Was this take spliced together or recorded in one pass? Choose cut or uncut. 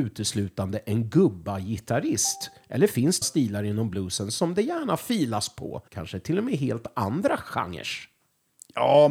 cut